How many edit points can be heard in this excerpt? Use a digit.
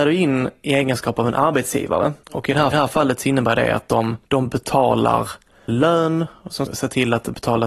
5